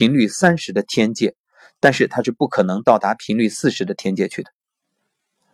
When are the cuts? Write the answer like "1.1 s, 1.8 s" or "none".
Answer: none